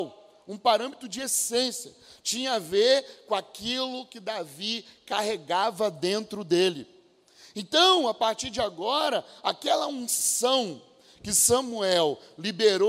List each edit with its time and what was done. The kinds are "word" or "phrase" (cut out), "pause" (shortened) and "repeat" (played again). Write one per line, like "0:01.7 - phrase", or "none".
none